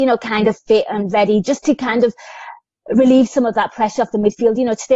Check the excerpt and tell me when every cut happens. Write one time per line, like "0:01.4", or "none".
none